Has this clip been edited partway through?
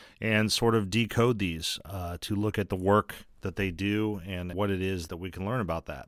yes; 2 cuts; at 4.5 s, 5.1 s

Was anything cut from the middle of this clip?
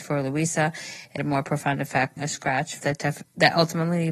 yes; 3 cuts; at 1.2 s, 2.2 s, 2.8 s

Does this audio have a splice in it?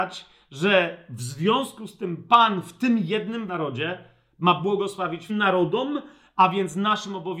yes; 2 cuts; at 3.5 s, 5.3 s

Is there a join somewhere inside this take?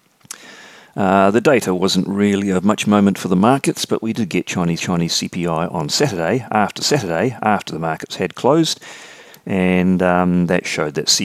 yes; 2 cuts; at 4.8 s, 6.8 s

